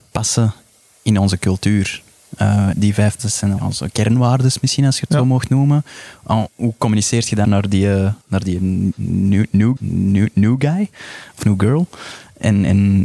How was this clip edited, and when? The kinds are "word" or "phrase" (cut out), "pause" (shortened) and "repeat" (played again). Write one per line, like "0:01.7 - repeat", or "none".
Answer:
0:02.7 - phrase
0:03.2 - word
0:03.6 - word
0:06.5 - word
0:07.4 - word
0:08.2 - pause
0:09.8 - repeat